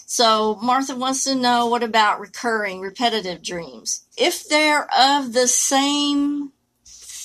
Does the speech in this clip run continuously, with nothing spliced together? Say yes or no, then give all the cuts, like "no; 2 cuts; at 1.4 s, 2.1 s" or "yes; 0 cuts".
no; 1 cut; at 4.1 s